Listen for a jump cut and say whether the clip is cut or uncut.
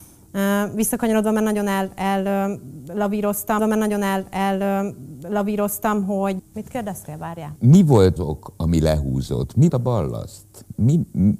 cut